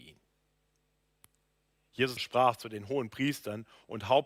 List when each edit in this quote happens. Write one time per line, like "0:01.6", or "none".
0:02.2